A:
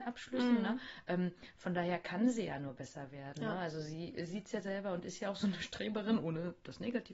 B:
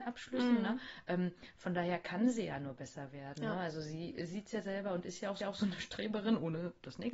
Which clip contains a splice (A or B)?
B